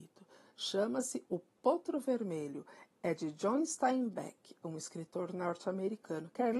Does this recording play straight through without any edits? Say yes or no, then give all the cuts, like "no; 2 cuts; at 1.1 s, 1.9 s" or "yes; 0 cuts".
yes; 0 cuts